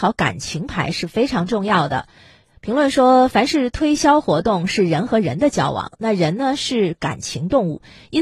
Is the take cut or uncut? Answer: uncut